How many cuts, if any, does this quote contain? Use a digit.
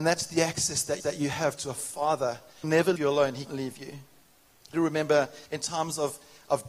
6